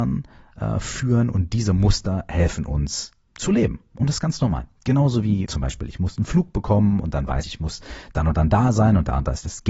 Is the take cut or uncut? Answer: cut